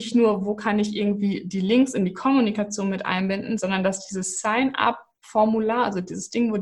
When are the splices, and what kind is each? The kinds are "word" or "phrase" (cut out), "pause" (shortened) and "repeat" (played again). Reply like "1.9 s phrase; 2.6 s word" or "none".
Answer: none